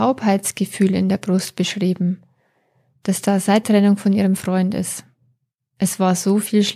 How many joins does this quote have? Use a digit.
1